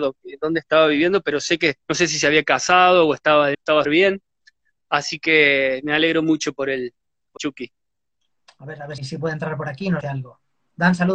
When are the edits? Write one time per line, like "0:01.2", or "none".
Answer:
0:01.8
0:03.5
0:03.8
0:07.4
0:09.0
0:10.0